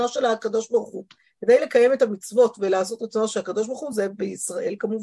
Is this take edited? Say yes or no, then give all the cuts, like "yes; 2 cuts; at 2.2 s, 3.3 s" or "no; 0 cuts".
no; 0 cuts